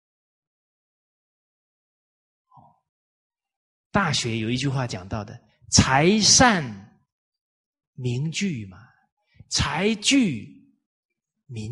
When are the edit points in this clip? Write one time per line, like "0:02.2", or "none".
none